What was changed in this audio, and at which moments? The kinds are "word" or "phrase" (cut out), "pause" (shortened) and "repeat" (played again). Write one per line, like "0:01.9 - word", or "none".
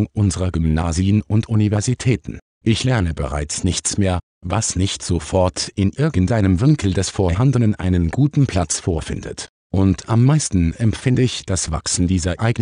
none